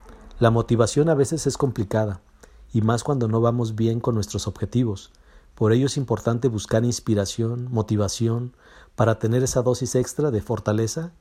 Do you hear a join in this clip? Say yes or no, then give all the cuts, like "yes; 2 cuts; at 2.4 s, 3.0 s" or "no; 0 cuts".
no; 0 cuts